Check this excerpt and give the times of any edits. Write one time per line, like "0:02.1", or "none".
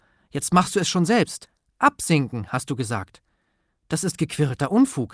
none